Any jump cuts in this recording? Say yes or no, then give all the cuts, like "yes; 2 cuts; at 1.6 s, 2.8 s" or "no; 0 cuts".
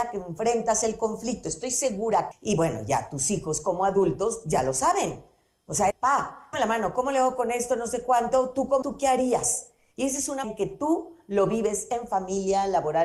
yes; 5 cuts; at 2.3 s, 5.9 s, 6.5 s, 8.8 s, 10.4 s